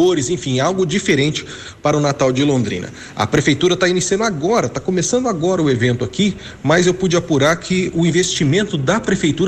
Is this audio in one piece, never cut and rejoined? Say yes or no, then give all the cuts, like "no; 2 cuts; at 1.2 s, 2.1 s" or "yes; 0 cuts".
yes; 0 cuts